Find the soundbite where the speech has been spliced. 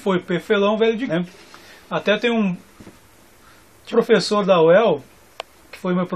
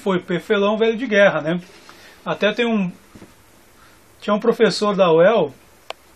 first; 2 cuts; at 1.1 s, 3.9 s

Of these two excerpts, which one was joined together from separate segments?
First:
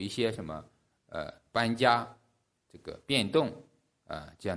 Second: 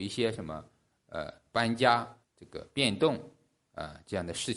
second; 1 cut; at 2.2 s

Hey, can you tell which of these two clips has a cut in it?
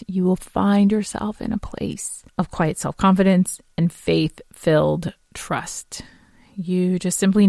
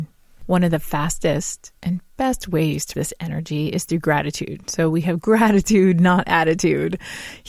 second; 2 cuts; at 1.8 s, 2.9 s

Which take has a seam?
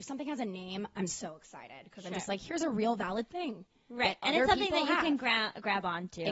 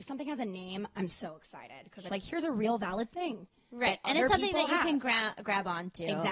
second; 1 cut; at 2.1 s

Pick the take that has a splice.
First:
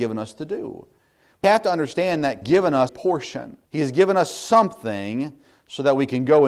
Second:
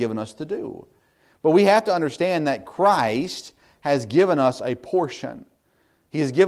first; 4 cuts; at 1.4 s, 2.4 s, 2.9 s, 3.6 s

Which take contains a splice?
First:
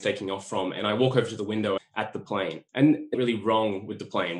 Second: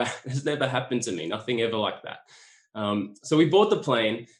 first; 3 cuts; at 1.8 s, 2.7 s, 3.1 s

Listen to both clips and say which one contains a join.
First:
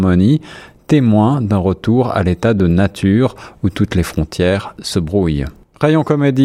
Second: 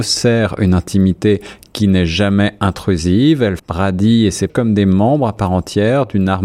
second; 2 cuts; at 3.6 s, 4.5 s

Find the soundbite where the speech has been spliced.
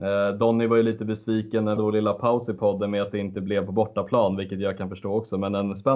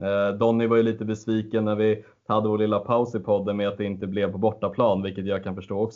first; 1 cut; at 1.8 s

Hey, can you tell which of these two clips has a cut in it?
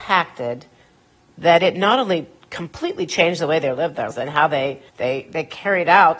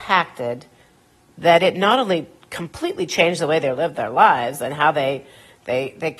first; 2 cuts; at 4.1 s, 4.9 s

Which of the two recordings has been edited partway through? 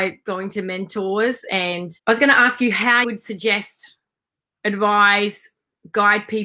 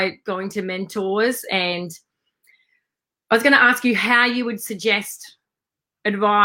first; 2 cuts; at 2.0 s, 3.0 s

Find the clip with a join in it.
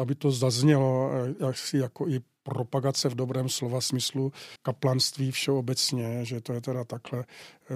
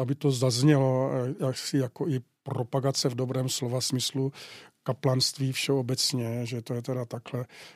first; 1 cut; at 4.6 s

